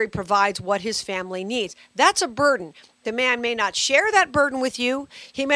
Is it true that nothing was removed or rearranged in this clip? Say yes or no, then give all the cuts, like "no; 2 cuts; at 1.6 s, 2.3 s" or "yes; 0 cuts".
yes; 0 cuts